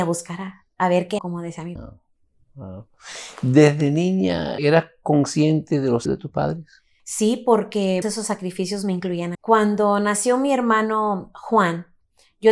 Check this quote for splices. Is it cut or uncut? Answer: cut